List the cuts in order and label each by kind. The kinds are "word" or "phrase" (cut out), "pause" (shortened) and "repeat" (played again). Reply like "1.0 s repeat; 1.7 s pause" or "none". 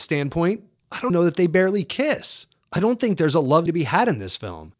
1.1 s word; 3.7 s word